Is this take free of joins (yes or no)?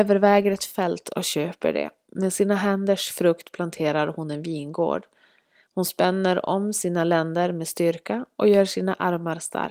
yes